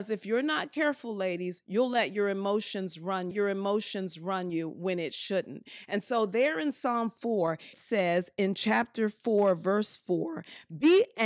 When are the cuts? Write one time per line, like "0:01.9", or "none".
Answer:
0:03.3
0:07.7